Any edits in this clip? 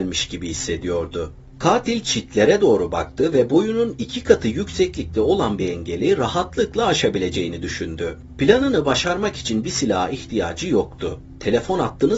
no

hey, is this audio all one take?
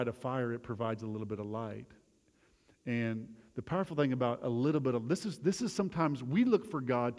yes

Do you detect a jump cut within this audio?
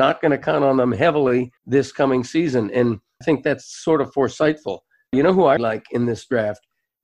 yes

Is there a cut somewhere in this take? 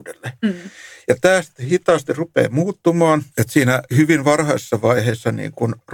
yes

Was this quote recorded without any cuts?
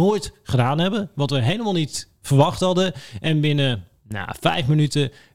yes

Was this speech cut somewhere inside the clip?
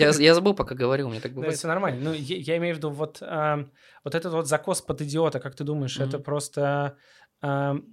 no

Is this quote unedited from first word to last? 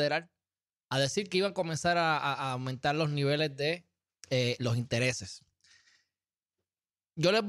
yes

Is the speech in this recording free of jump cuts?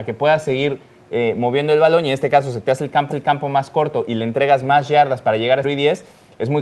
no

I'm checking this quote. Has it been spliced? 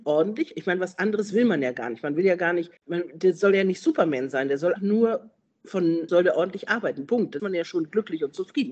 yes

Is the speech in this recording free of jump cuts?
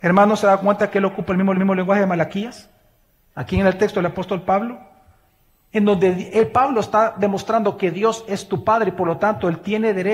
no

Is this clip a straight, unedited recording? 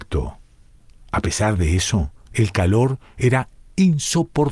yes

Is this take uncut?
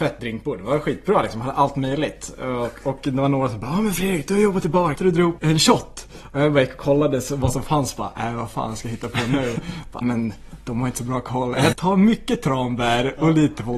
no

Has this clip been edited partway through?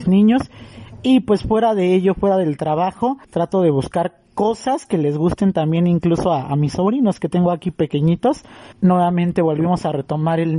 yes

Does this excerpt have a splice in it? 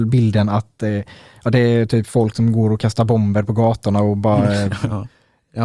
no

